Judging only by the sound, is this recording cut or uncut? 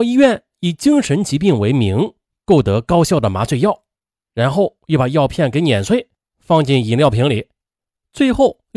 uncut